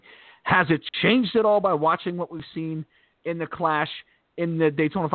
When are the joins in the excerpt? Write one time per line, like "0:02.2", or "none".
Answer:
none

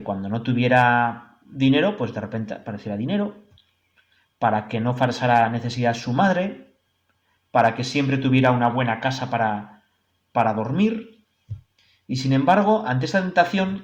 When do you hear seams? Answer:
none

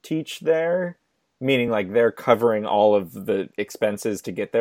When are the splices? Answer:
none

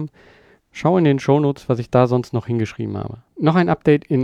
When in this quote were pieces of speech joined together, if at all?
0:03.3

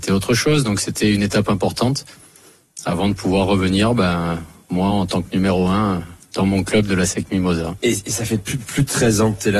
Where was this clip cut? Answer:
none

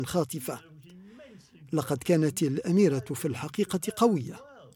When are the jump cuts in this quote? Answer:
none

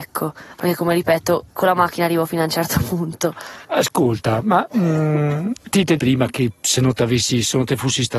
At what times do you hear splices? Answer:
0:01.5
0:03.6
0:06.0

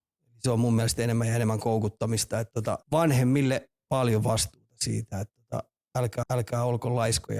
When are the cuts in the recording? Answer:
0:02.8
0:06.2

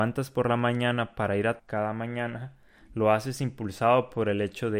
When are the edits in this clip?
0:01.6

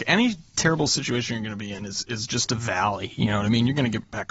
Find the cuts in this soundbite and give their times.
none

